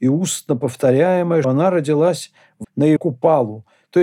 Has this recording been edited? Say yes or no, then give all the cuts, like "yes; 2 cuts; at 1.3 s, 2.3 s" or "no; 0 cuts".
yes; 3 cuts; at 1.4 s, 2.6 s, 3.0 s